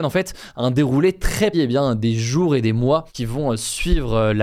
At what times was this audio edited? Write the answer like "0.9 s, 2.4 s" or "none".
1.5 s, 3.1 s